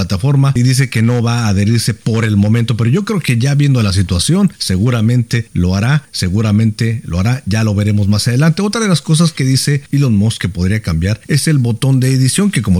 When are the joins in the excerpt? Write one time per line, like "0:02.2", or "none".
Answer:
none